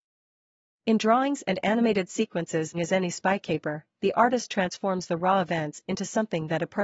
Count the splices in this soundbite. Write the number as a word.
one